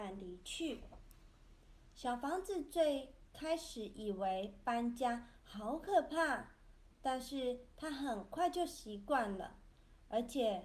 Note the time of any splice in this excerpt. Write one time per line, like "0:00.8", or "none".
none